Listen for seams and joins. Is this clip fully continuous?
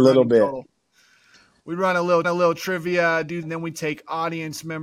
no; 2 cuts; at 2.2 s, 3.4 s

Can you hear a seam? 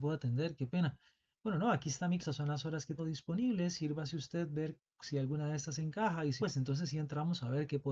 yes; 3 cuts; at 2.2 s, 3.0 s, 6.4 s

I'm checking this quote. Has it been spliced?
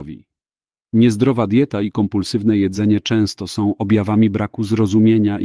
no; 0 cuts

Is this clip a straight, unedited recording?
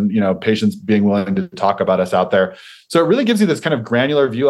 yes; 0 cuts

